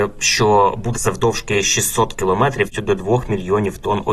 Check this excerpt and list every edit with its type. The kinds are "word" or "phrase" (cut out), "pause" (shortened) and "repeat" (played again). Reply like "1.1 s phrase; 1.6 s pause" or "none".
0.9 s phrase; 2.7 s word